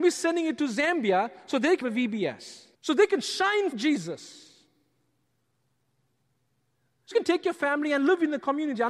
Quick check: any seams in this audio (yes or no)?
yes